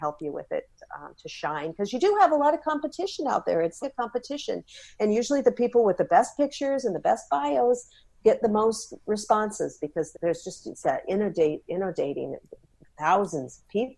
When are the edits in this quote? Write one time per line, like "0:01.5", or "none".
0:03.8
0:08.2
0:10.1
0:10.8